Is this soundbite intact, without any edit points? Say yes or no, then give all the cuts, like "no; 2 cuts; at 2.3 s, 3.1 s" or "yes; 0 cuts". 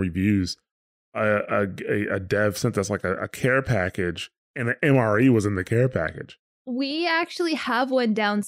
yes; 0 cuts